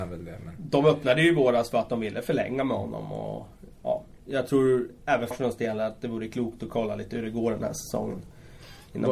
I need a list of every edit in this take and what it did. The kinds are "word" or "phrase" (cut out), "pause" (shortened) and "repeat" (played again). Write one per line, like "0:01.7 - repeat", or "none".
0:05.3 - word